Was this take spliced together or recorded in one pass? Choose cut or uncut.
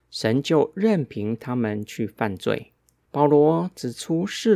uncut